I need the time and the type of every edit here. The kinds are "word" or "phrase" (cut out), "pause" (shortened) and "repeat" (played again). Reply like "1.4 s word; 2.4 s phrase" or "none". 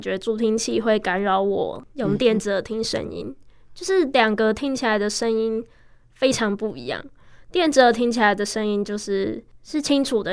none